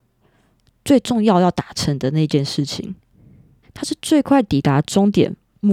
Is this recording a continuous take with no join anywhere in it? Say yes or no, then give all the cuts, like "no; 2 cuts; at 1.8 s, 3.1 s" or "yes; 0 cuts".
no; 1 cut; at 3.6 s